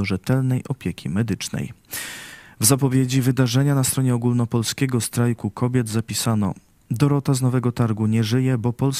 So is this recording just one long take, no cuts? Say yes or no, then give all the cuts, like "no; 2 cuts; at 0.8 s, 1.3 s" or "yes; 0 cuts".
yes; 0 cuts